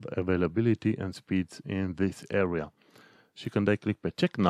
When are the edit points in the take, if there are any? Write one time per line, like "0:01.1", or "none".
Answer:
none